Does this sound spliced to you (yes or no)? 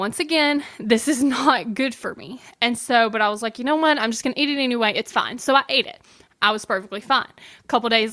no